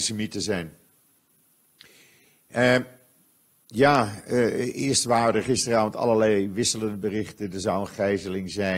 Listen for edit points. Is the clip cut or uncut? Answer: uncut